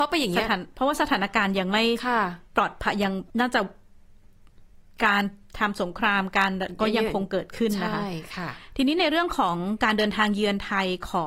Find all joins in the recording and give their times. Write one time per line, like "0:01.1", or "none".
0:02.5
0:03.3